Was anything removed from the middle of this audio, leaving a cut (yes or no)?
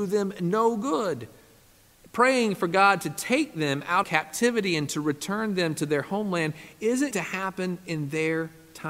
yes